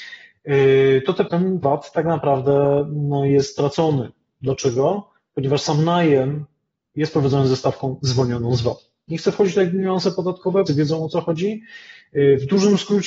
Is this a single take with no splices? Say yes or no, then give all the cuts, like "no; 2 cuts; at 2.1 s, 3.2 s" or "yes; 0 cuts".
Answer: no; 3 cuts; at 1.3 s, 1.6 s, 10.7 s